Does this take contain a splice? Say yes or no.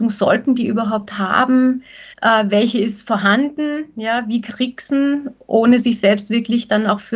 yes